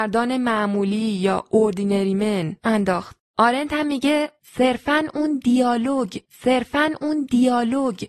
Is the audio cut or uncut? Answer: cut